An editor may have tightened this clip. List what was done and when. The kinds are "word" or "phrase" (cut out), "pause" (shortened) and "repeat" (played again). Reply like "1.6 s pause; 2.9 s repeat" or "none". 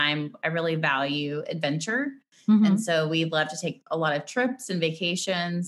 none